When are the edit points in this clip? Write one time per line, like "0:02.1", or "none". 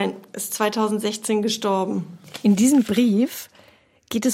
none